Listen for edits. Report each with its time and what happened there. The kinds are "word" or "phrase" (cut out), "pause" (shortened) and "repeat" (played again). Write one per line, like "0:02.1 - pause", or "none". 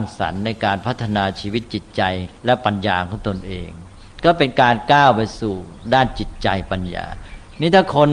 0:02.4 - pause